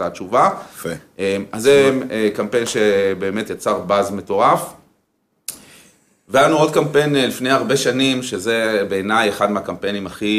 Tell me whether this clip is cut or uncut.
uncut